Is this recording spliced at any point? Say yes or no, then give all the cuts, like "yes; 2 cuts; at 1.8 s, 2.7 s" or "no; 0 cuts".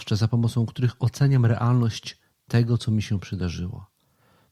no; 0 cuts